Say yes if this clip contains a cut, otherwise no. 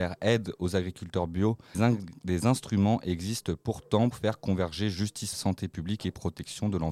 yes